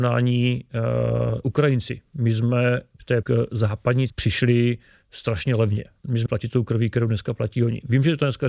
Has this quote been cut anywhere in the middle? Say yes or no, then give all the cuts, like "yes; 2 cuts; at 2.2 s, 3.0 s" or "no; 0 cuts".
yes; 4 cuts; at 1.4 s, 3.2 s, 4.1 s, 6.3 s